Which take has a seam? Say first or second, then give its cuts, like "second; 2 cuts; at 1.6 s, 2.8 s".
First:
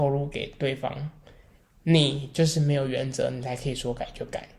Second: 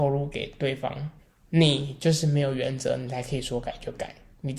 second; 1 cut; at 1.2 s